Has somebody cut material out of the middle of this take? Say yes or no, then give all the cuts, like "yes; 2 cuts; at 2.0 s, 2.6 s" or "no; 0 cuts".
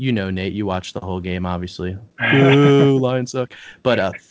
yes; 1 cut; at 2.1 s